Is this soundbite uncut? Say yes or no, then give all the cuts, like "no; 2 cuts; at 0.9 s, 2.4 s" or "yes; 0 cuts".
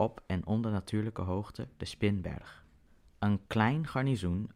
no; 1 cut; at 3.5 s